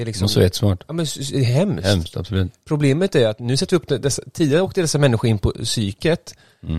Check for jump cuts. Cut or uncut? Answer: uncut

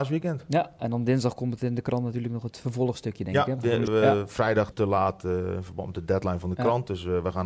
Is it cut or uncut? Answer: cut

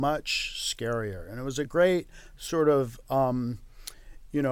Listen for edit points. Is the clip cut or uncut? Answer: uncut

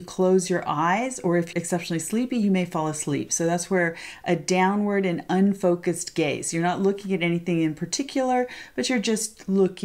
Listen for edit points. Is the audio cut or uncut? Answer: cut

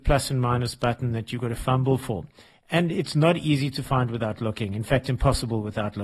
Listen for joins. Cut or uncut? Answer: uncut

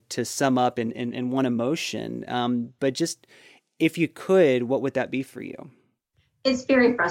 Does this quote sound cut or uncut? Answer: uncut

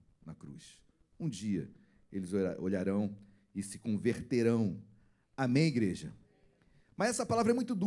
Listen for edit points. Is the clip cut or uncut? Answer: uncut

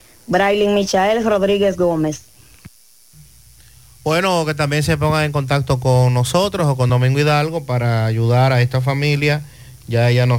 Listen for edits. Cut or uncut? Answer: uncut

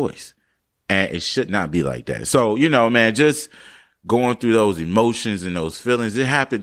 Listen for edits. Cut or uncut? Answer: uncut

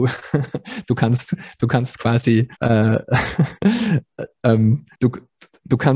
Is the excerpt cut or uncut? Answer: cut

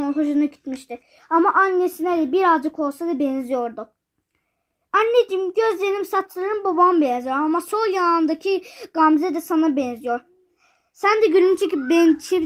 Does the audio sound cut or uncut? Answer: uncut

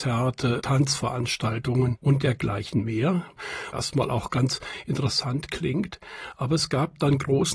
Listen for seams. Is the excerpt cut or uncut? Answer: cut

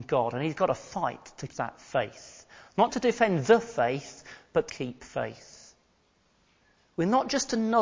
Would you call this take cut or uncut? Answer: cut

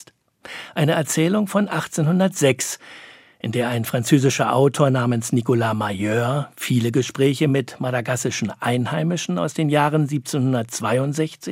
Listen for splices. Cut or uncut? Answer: uncut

